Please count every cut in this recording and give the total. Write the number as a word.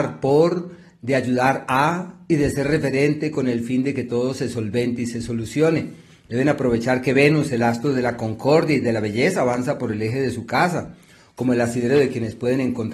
zero